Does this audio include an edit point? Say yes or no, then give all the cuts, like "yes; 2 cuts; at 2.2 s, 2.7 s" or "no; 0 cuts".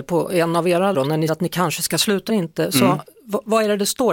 yes; 3 cuts; at 0.9 s, 1.3 s, 2.3 s